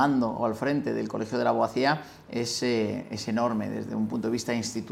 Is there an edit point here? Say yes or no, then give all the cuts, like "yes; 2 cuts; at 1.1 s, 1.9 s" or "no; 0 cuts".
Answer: no; 0 cuts